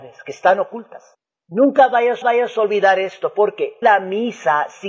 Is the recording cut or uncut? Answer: cut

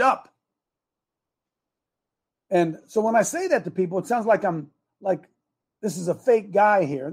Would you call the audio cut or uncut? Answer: uncut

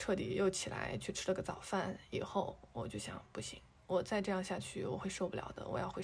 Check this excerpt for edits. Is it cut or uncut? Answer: uncut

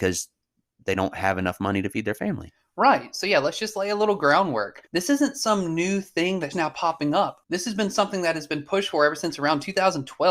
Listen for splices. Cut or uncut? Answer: cut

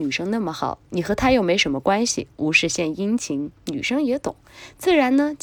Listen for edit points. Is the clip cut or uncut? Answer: cut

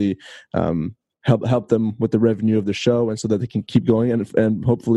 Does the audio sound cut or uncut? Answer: uncut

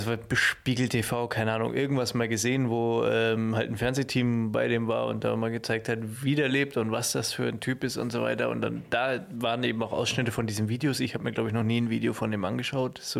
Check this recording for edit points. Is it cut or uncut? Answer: uncut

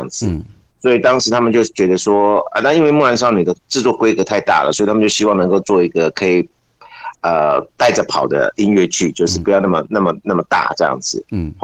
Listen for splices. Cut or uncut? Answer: cut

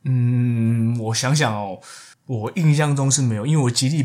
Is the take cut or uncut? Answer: cut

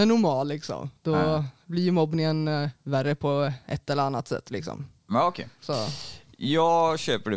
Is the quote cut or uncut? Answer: cut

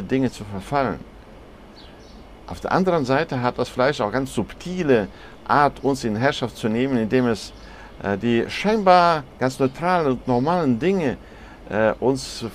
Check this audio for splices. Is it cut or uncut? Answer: uncut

